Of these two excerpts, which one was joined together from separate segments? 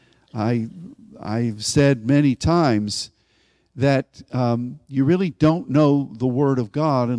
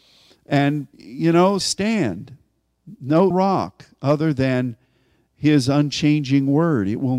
second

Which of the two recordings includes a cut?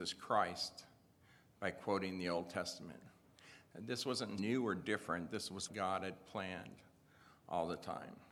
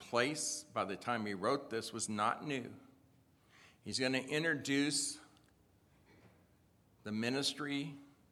first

